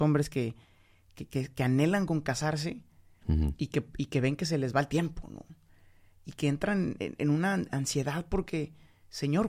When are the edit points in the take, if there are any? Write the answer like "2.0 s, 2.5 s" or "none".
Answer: none